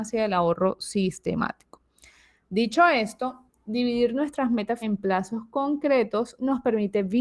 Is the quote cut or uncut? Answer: cut